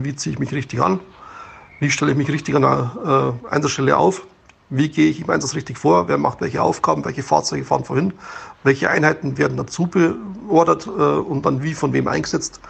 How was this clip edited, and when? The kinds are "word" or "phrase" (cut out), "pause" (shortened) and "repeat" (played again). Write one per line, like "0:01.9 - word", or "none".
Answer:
0:03.4 - word